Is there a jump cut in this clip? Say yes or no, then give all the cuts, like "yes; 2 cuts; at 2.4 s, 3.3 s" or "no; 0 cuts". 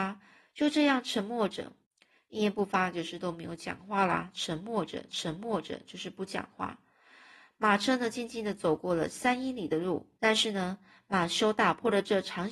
yes; 3 cuts; at 1.8 s, 5.1 s, 10.2 s